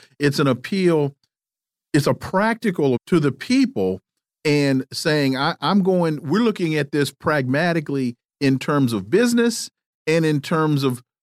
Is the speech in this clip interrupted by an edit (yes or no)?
yes